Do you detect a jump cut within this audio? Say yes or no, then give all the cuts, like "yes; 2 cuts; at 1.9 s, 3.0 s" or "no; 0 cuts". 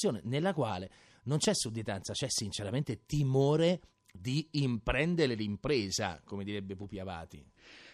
no; 0 cuts